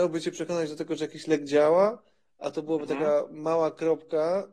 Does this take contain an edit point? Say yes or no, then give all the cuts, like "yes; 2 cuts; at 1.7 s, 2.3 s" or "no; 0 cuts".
no; 0 cuts